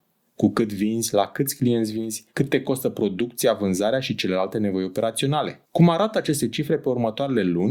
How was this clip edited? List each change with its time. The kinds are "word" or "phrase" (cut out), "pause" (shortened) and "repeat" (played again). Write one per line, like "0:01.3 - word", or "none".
0:02.3 - pause
0:05.6 - pause